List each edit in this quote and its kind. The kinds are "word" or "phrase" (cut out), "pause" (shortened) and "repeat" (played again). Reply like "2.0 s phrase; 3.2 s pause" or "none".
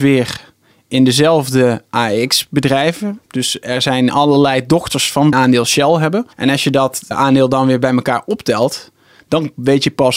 5.3 s phrase; 6.3 s pause; 7.1 s word